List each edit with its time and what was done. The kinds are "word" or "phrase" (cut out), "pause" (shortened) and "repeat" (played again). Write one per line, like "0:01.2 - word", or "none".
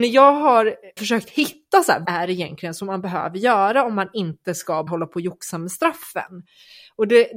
0:01.0 - word
0:02.0 - word
0:04.9 - word

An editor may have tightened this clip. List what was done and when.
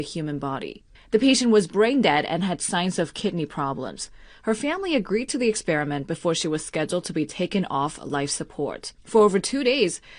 0:00.9 - pause
0:09.0 - pause

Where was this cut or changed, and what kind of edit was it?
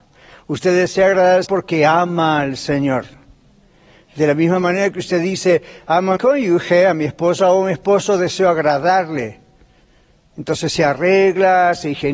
0:01.5 - word
0:06.2 - word

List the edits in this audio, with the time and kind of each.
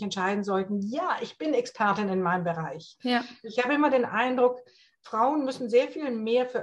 none

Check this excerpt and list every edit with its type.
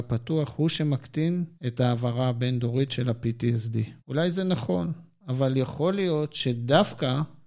0:01.6 - pause
0:04.0 - pause

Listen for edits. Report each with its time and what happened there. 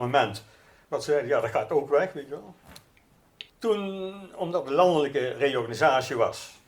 0:03.5 - pause

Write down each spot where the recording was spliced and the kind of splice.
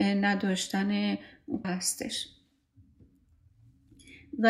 0:01.6 - phrase

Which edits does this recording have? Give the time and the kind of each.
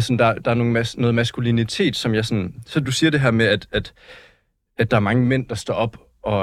none

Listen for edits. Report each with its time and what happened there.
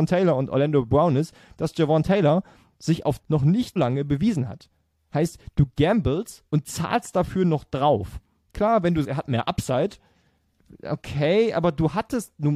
0:03.2 - phrase
0:03.8 - word
0:09.0 - word

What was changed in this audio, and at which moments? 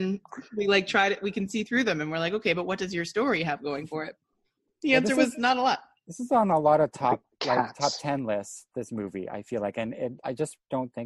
none

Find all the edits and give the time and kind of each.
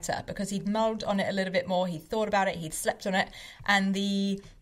none

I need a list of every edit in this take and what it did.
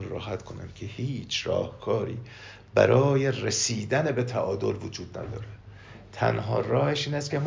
none

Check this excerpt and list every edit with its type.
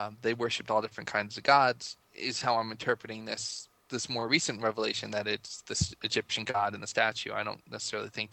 0:02.0 - pause
0:03.8 - pause

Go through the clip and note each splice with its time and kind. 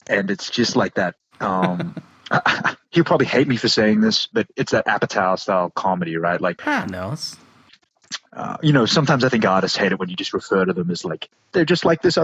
0:06.6 - word

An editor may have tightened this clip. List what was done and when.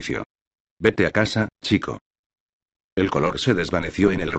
none

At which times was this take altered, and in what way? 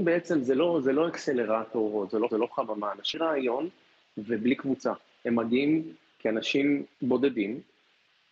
0:02.3 - repeat
0:03.1 - phrase
0:06.9 - pause

